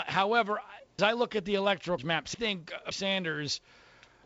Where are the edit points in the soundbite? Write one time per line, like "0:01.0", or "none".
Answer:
0:01.0
0:02.0
0:02.3
0:02.9